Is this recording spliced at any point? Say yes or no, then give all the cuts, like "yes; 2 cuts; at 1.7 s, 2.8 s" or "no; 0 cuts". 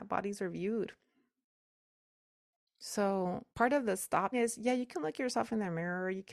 yes; 2 cuts; at 3.5 s, 4.3 s